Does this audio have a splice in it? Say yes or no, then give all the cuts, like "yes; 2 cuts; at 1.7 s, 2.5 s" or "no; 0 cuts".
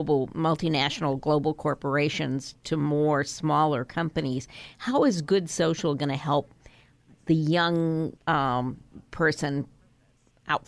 yes; 1 cut; at 8.2 s